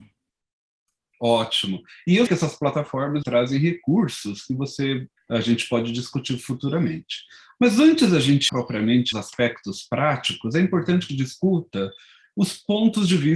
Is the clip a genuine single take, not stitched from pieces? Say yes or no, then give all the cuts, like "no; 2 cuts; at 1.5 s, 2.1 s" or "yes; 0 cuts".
no; 6 cuts; at 2.3 s, 3.2 s, 5.2 s, 8.5 s, 9.1 s, 11.1 s